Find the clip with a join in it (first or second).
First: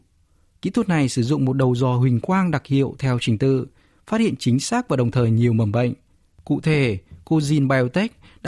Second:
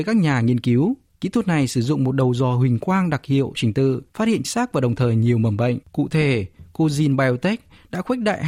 second